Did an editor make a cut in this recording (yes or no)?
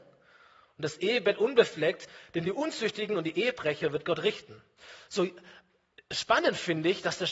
no